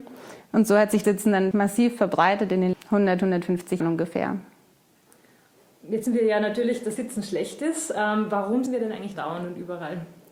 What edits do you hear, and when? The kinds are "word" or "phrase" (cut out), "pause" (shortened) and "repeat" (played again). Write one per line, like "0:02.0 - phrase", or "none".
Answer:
0:01.0 - word
0:01.5 - word
0:02.7 - word
0:03.8 - word
0:06.1 - word
0:07.0 - word
0:08.7 - word
0:09.1 - word